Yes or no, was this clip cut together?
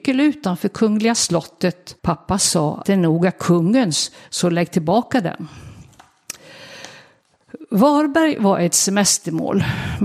yes